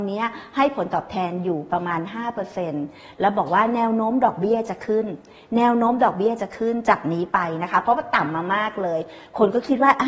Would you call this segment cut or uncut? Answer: uncut